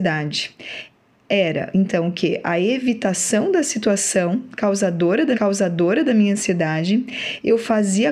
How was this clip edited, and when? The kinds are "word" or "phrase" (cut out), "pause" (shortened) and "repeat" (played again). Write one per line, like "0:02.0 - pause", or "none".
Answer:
0:05.3 - repeat